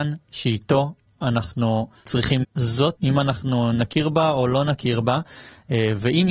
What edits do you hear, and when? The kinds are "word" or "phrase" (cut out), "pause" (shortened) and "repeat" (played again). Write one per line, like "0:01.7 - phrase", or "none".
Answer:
0:02.4 - word
0:03.0 - word